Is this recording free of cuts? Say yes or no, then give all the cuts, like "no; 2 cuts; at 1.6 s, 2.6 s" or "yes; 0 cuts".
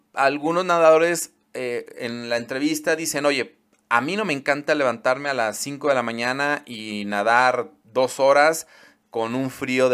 yes; 0 cuts